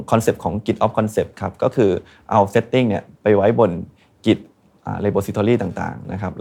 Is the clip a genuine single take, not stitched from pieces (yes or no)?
yes